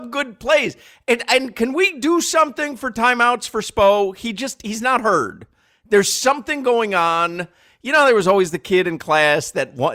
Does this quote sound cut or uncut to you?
uncut